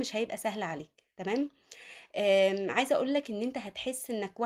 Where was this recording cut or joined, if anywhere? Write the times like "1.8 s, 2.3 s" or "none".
none